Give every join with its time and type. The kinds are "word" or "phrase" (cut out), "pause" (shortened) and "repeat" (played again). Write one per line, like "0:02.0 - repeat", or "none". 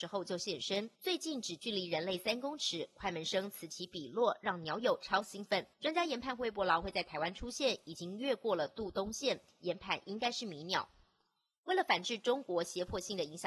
0:00.9 - pause
0:05.7 - pause